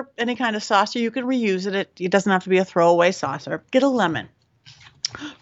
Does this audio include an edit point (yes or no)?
yes